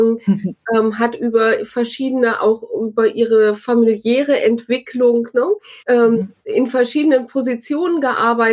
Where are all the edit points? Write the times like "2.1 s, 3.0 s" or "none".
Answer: 5.8 s, 6.4 s